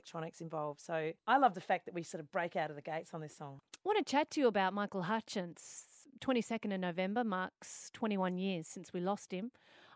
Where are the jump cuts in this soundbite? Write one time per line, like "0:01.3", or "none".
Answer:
0:01.2